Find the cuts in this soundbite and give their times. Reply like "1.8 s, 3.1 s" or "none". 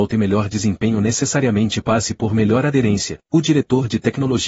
3.2 s